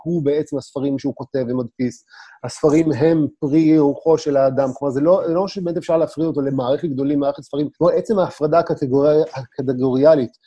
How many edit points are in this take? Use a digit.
2